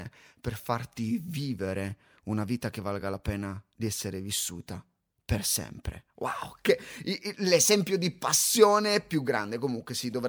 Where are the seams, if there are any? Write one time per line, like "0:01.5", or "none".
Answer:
none